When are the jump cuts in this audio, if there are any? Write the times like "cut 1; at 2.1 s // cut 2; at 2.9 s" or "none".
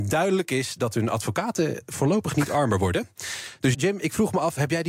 cut 1; at 3.7 s